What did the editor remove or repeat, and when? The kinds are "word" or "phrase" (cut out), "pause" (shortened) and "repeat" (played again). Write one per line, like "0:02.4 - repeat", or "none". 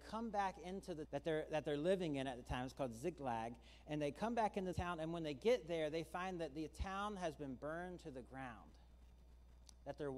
0:01.0 - word
0:04.7 - word